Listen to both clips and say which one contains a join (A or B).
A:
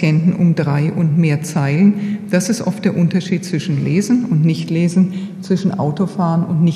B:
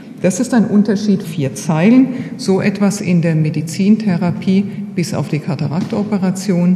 B